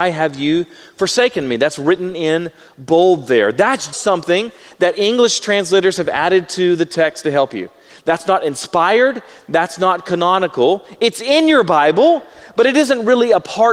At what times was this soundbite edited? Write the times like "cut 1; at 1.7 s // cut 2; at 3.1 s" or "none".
cut 1; at 3.9 s

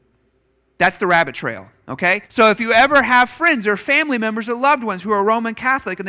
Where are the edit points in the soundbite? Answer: cut 1; at 2.3 s

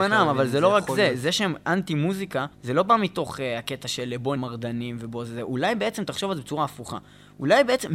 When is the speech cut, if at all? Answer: cut 1; at 2.5 s // cut 2; at 4.4 s

